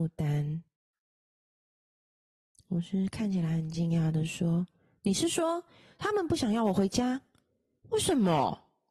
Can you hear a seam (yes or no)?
no